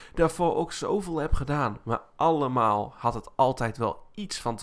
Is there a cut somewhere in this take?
no; 0 cuts

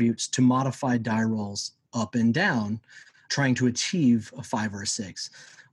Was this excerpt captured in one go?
yes; 0 cuts

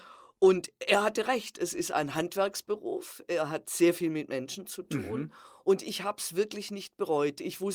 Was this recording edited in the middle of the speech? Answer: no; 0 cuts

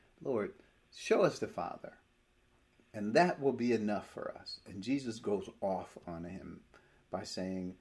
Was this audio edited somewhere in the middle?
no; 0 cuts

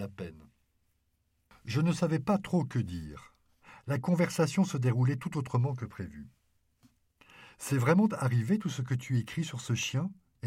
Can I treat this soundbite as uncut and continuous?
yes; 0 cuts

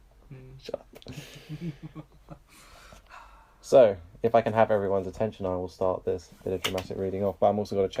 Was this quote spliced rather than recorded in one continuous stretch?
no; 0 cuts

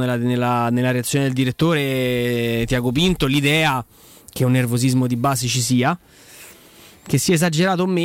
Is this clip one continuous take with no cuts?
yes; 0 cuts

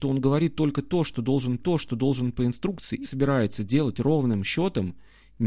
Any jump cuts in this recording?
yes; 2 cuts; at 1.6 s, 3.0 s

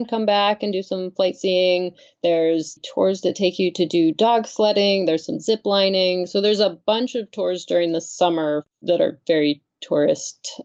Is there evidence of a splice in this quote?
no; 0 cuts

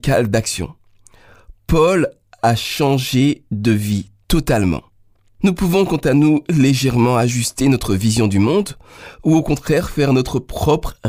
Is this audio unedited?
yes; 0 cuts

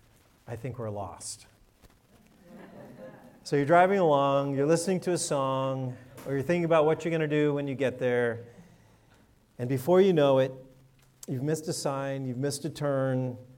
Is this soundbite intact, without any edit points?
yes; 0 cuts

